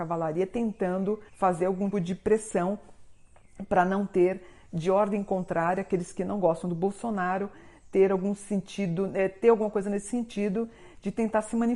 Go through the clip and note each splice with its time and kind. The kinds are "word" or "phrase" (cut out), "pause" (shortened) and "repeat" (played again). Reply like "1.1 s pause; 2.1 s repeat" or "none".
1.3 s pause; 1.9 s word